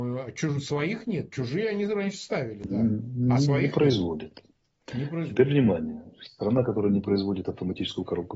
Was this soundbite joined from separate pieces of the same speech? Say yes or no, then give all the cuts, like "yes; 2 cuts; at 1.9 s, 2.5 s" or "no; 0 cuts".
no; 0 cuts